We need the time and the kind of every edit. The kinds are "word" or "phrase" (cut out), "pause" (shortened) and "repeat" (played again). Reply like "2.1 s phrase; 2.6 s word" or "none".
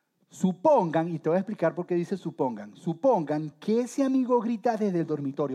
none